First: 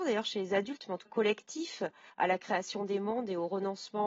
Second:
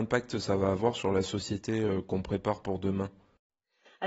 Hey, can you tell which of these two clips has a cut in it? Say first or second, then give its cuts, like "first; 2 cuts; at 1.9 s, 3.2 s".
first; 2 cuts; at 1.1 s, 2.1 s